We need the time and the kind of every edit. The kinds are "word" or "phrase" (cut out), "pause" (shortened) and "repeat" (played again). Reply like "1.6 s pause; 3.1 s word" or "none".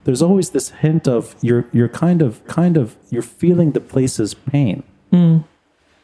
2.4 s repeat

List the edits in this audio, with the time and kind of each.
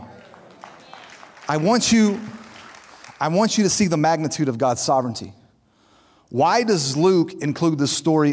none

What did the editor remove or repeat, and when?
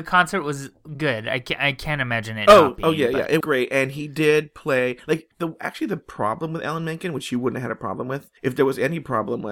3.4 s word; 5.3 s pause; 8.4 s pause

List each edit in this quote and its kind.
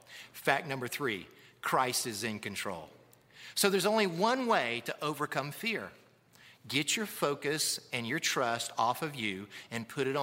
none

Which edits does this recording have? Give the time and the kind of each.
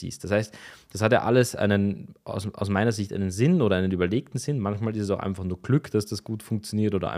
none

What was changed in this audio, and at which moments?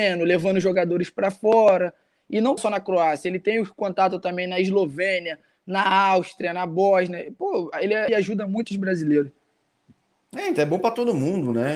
2.6 s word; 8.1 s word

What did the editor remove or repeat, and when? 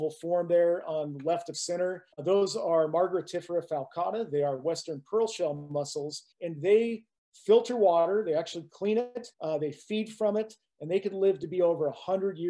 2.1 s pause; 6.3 s pause; 9.3 s pause

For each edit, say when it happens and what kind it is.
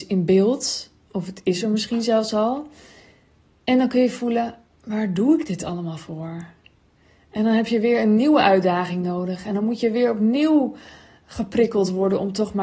none

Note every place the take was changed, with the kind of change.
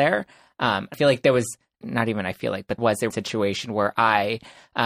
0.9 s word; 1.8 s word; 2.8 s word; 3.1 s word

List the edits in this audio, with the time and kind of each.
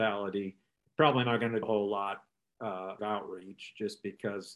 1.6 s word; 3.0 s word

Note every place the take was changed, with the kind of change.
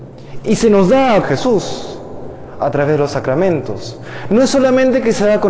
1.2 s word

